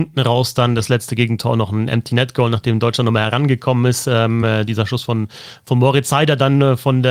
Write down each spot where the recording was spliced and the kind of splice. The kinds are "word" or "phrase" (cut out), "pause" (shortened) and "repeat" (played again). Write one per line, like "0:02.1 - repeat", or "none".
none